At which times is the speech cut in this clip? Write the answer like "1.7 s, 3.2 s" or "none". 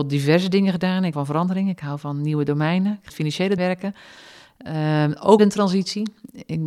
1.1 s, 3.1 s, 3.6 s, 5.4 s